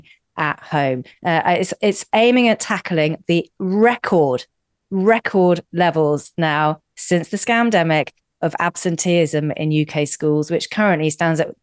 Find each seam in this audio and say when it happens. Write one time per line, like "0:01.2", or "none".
none